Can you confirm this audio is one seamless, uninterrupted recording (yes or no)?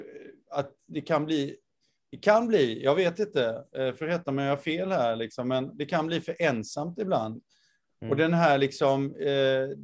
yes